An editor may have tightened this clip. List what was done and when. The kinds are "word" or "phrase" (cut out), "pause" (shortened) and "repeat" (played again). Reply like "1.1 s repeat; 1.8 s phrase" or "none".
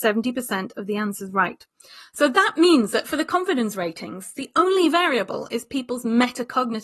none